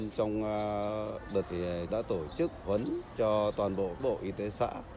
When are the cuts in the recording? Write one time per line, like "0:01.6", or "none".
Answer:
0:01.4
0:01.9
0:02.6
0:04.0